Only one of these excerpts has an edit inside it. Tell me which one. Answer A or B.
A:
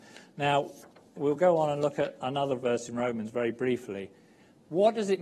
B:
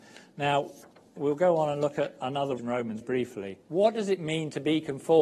B